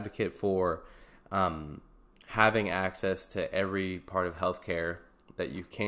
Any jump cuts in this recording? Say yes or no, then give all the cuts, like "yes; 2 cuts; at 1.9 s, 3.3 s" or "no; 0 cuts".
no; 0 cuts